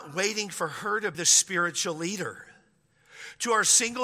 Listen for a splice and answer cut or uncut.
cut